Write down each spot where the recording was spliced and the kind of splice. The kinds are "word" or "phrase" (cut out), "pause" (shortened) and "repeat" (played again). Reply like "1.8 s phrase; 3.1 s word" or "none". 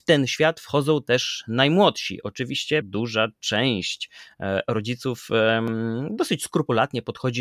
2.8 s word